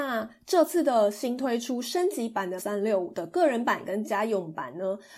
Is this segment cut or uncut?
cut